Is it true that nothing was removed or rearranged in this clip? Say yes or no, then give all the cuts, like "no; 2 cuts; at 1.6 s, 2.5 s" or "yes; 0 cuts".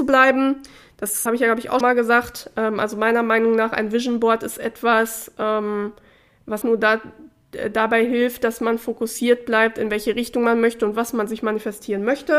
no; 3 cuts; at 1.3 s, 1.8 s, 6.6 s